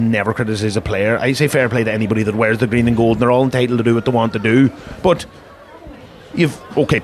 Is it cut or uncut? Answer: uncut